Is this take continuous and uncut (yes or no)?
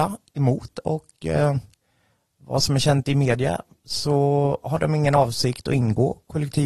yes